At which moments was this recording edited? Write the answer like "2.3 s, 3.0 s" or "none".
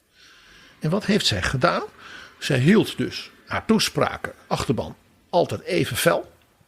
3.4 s, 4.5 s

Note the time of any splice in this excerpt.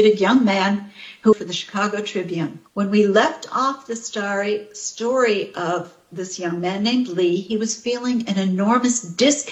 1.3 s, 2.7 s

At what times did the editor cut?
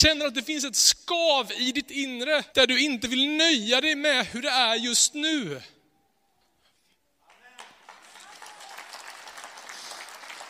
2.5 s

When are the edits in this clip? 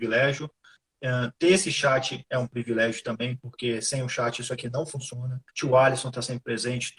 5.5 s

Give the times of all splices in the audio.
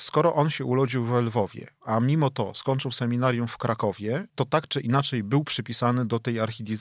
4.3 s

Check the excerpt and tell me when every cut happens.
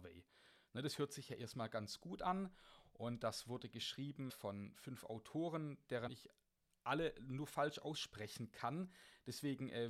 4.3 s, 6.1 s

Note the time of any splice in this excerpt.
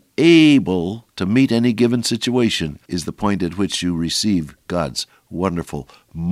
1.1 s, 2.8 s

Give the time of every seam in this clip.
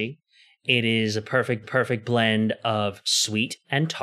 1.6 s

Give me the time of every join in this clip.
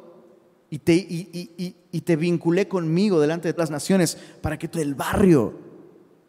3.6 s, 4.7 s

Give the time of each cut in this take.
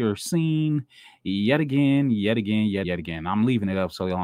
2.8 s

